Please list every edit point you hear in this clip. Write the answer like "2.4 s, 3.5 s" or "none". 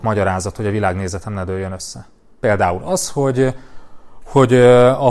none